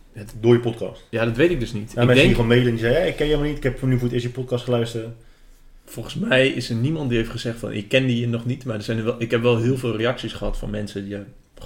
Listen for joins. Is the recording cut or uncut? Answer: uncut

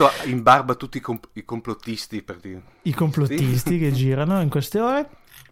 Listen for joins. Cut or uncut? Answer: uncut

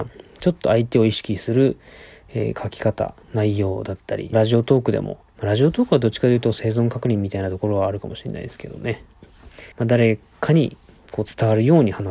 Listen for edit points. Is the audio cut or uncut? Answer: cut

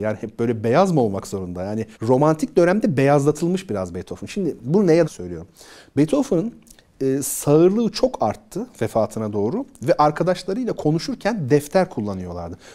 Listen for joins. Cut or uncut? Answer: cut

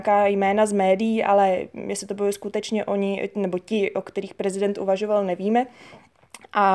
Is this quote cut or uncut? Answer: uncut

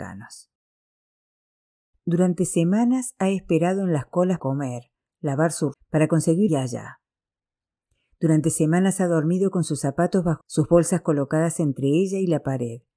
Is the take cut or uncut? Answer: cut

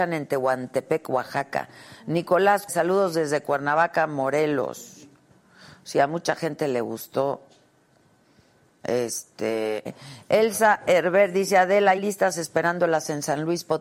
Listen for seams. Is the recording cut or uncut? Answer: cut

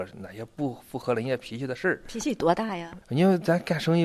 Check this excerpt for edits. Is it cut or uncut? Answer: uncut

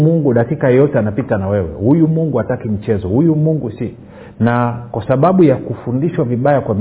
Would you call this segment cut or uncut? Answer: uncut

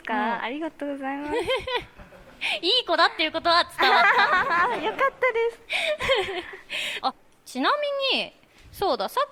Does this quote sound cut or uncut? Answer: uncut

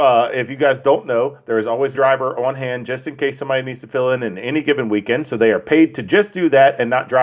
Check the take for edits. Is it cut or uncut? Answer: cut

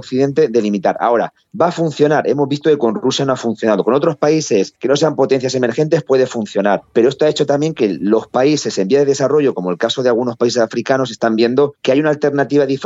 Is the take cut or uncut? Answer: uncut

